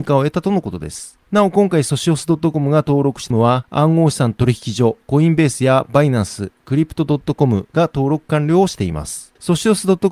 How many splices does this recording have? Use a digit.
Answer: 1